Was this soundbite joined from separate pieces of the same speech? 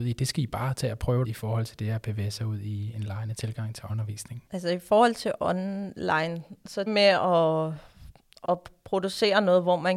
yes; 5 cuts; at 1.2 s, 3.9 s, 4.5 s, 6.9 s, 8.4 s

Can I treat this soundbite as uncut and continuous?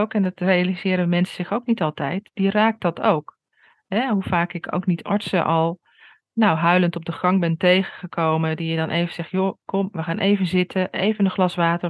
yes; 0 cuts

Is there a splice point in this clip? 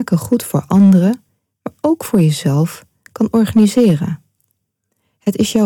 no; 0 cuts

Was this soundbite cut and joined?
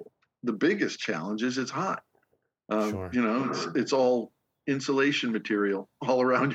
no; 0 cuts

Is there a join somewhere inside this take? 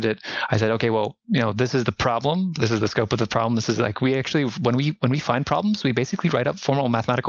no; 0 cuts

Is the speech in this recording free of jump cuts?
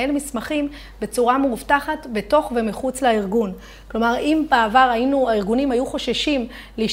yes; 0 cuts

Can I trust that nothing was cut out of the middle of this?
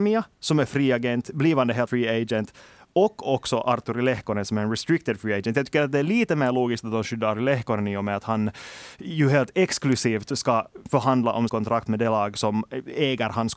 no; 3 cuts; at 1.9 s, 7.3 s, 11.5 s

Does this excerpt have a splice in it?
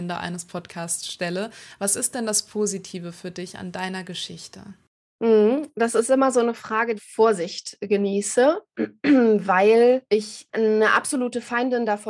yes; 1 cut; at 7.0 s

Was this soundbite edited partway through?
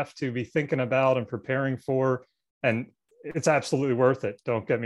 no; 0 cuts

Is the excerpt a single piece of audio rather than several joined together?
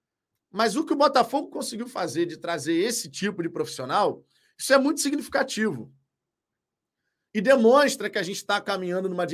yes; 0 cuts

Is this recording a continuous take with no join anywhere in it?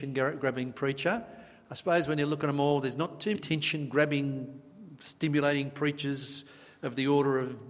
no; 1 cut; at 3.3 s

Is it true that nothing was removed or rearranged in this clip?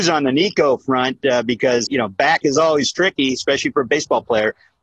no; 1 cut; at 1.9 s

